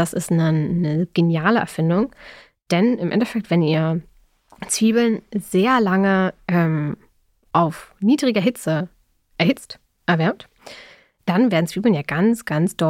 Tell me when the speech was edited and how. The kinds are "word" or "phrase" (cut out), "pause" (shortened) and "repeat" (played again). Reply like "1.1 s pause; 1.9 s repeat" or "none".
none